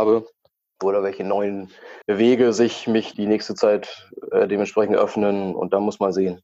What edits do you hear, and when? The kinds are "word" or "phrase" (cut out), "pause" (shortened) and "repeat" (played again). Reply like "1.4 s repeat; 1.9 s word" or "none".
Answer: 2.0 s pause; 3.1 s word